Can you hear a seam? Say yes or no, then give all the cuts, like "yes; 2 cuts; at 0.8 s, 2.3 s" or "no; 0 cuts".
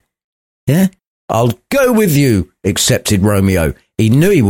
yes; 1 cut; at 1.1 s